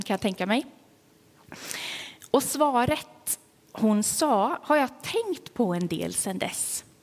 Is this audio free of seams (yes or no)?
yes